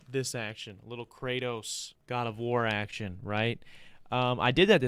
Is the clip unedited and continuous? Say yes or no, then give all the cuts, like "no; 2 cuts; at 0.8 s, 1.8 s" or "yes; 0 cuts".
no; 1 cut; at 1.9 s